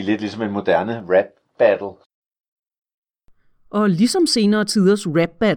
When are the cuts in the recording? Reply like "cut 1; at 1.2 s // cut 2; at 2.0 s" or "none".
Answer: none